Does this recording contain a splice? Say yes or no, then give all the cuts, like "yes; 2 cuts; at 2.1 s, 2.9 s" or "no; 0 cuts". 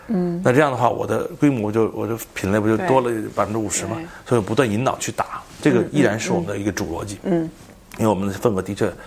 no; 0 cuts